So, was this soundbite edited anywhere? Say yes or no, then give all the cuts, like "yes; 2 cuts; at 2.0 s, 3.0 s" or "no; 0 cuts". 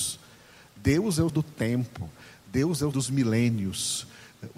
yes; 2 cuts; at 1.3 s, 2.9 s